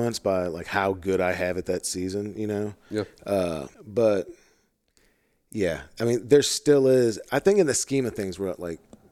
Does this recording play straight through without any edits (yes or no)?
no